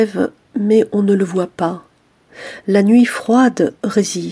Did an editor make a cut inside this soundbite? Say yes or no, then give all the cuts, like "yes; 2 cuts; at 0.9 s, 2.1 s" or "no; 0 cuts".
no; 0 cuts